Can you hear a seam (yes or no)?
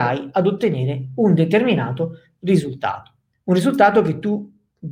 no